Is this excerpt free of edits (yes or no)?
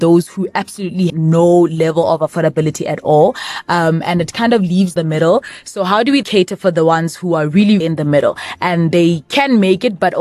no